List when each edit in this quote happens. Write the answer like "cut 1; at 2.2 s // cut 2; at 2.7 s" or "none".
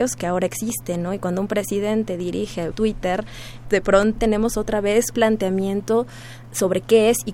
cut 1; at 2.7 s // cut 2; at 3.6 s // cut 3; at 4.2 s // cut 4; at 5.1 s

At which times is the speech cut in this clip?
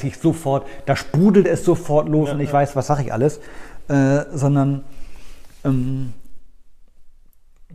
none

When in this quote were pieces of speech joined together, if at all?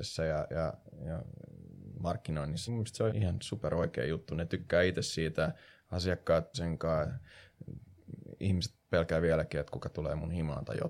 cut 1; at 2.7 s // cut 2; at 3.1 s // cut 3; at 6.5 s

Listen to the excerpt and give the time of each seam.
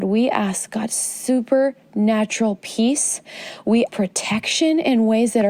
cut 1; at 3.9 s

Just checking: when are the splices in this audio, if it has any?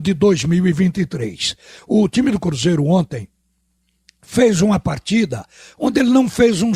none

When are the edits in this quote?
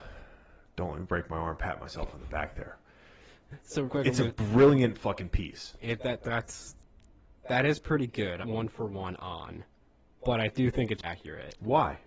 cut 1; at 3.9 s // cut 2; at 8.4 s // cut 3; at 11.0 s

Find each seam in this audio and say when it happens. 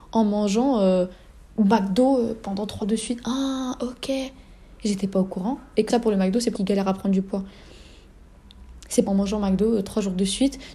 cut 1; at 2.8 s // cut 2; at 5.9 s // cut 3; at 6.5 s // cut 4; at 9.1 s

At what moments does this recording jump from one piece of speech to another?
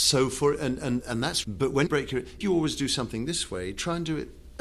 cut 1; at 1.0 s // cut 2; at 1.4 s // cut 3; at 1.9 s // cut 4; at 2.4 s

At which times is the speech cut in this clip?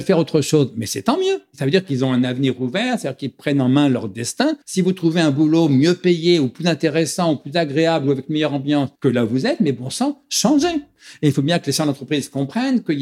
cut 1; at 4.6 s // cut 2; at 9.0 s

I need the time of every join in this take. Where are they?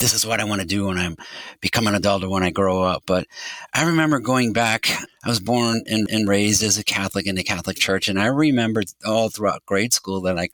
cut 1; at 6.1 s

